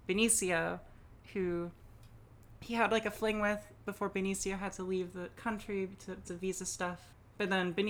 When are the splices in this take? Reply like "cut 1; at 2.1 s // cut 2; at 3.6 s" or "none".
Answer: cut 1; at 6.2 s